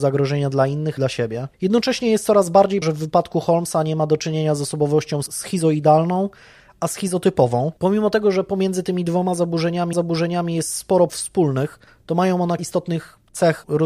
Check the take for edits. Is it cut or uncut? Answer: cut